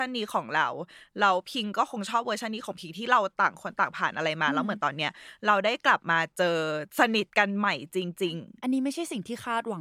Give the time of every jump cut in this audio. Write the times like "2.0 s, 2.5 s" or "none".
6.9 s, 7.3 s